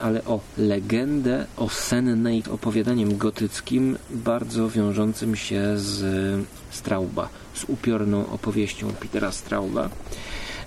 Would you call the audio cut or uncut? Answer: cut